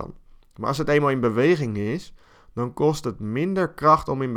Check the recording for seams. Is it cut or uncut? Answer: uncut